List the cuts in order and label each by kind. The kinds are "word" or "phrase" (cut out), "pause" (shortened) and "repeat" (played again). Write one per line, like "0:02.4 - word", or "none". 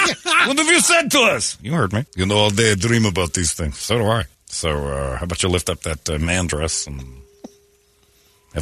0:02.1 - pause
0:04.3 - pause